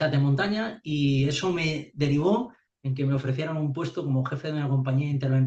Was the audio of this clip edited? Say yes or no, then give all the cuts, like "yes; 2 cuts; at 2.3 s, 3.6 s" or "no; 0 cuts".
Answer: no; 0 cuts